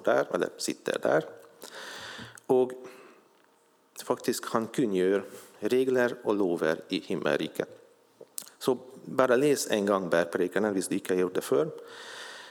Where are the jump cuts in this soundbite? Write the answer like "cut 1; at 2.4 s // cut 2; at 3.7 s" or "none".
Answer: none